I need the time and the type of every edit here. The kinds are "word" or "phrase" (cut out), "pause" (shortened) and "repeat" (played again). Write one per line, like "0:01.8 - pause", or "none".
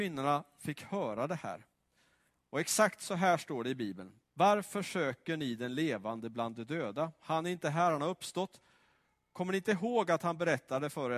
none